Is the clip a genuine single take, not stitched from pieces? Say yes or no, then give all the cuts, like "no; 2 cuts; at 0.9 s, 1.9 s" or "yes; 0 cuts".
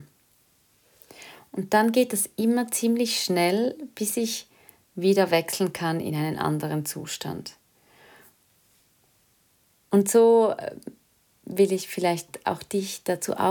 yes; 0 cuts